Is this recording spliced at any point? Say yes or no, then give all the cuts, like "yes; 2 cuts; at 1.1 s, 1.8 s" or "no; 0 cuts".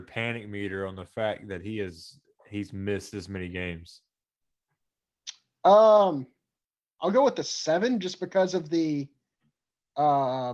no; 0 cuts